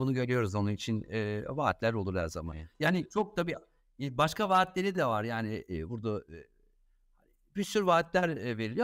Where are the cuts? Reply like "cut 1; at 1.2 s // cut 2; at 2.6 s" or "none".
none